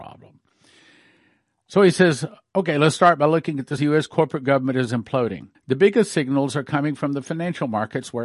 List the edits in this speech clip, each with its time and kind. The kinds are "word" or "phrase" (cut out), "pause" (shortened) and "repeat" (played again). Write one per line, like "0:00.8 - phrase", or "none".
0:03.8 - word
0:05.5 - pause